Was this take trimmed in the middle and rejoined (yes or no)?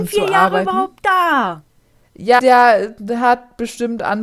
yes